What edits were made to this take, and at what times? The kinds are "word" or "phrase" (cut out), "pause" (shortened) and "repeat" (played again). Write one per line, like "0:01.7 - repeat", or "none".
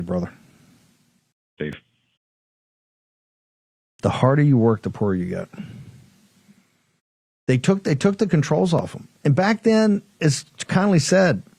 none